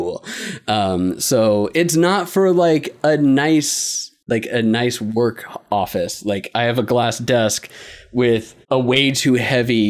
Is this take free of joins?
no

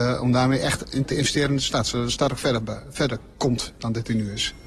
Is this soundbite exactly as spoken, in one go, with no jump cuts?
yes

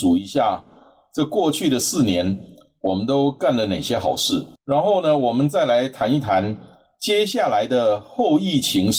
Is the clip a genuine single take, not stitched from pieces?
no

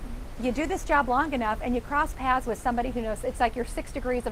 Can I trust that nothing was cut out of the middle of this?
yes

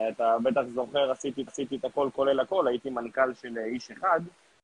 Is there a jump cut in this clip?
yes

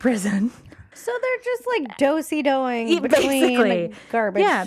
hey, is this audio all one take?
no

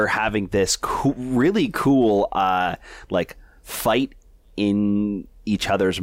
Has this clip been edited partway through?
no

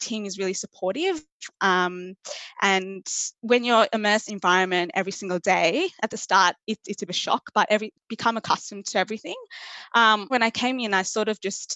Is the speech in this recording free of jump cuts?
no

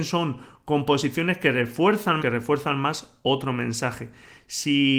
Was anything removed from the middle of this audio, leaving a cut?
yes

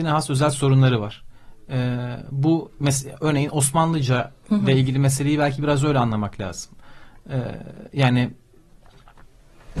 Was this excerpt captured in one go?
yes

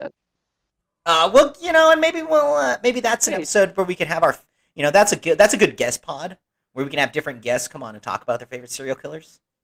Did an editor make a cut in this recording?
no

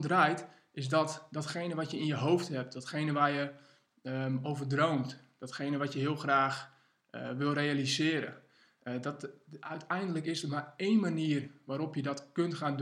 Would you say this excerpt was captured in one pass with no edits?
yes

